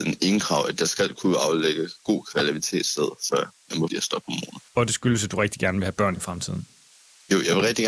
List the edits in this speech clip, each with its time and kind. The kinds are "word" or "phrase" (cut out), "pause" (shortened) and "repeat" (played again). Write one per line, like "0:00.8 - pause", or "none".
0:03.9 - word
0:04.7 - pause